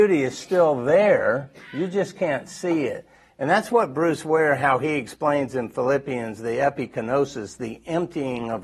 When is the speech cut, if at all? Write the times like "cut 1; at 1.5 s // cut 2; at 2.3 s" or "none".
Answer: none

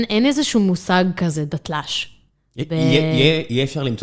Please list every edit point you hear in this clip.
none

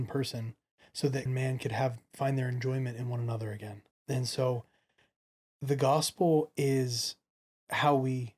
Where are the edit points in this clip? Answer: cut 1; at 1.3 s // cut 2; at 3.9 s

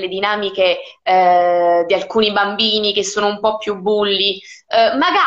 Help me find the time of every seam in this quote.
none

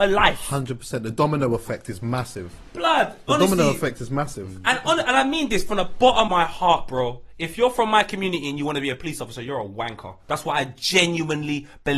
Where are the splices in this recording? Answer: cut 1; at 6.3 s

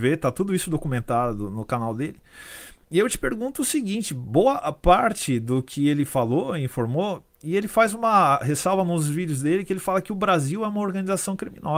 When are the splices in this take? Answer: none

